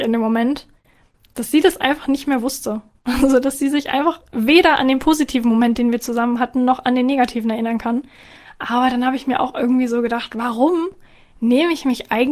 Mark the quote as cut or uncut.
uncut